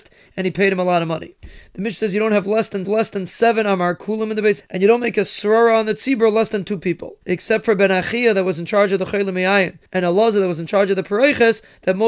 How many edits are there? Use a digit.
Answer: 4